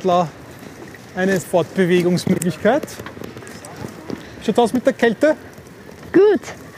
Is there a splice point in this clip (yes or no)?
yes